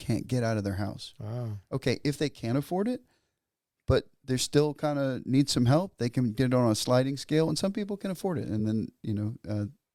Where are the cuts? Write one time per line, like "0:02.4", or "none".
none